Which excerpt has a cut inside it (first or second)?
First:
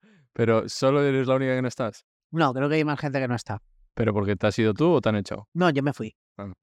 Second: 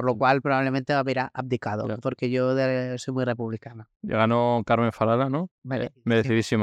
second